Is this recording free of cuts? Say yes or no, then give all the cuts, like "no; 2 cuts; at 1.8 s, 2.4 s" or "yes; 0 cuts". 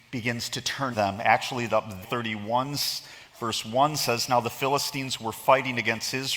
no; 3 cuts; at 0.9 s, 1.7 s, 2.0 s